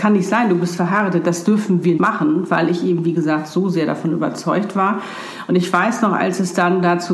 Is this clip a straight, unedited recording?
no; 1 cut; at 2.0 s

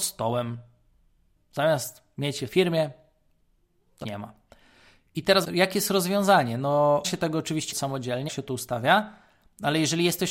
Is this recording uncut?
no; 7 cuts; at 1.4 s, 2.5 s, 4.0 s, 5.4 s, 7.0 s, 7.7 s, 8.3 s

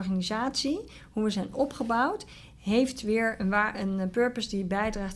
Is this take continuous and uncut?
yes; 0 cuts

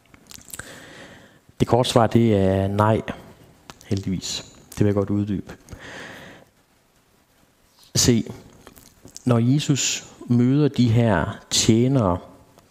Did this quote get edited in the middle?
no; 0 cuts

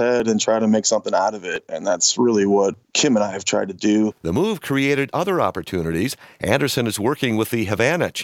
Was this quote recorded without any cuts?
no; 1 cut; at 2.8 s

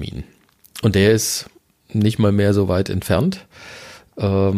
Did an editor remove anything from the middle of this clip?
no; 0 cuts

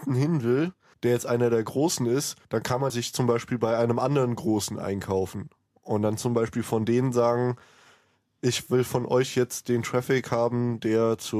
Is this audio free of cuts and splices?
no; 3 cuts; at 0.9 s, 2.4 s, 2.9 s

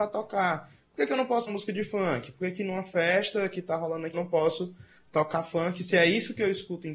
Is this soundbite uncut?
no; 2 cuts; at 1.5 s, 4.1 s

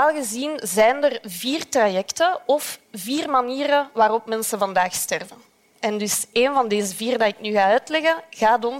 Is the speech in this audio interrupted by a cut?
no; 0 cuts

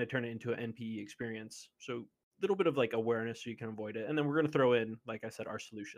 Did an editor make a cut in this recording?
no; 0 cuts

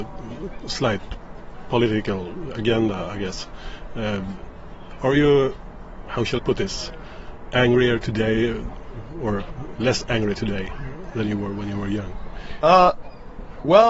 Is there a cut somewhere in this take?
yes; 2 cuts; at 6.1 s, 6.4 s

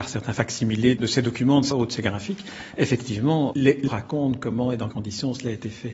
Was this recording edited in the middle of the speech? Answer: yes; 5 cuts; at 1.0 s, 1.7 s, 3.5 s, 3.9 s, 4.9 s

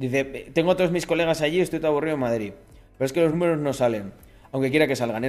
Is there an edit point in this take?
no; 0 cuts

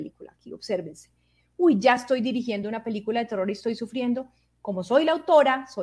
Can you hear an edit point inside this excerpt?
no; 0 cuts

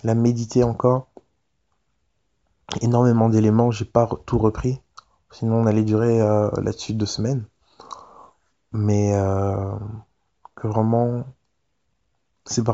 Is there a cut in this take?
no; 0 cuts

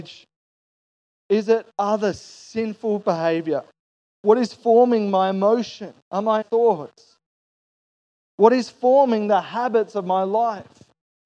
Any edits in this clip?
yes; 2 cuts; at 6.0 s, 6.4 s

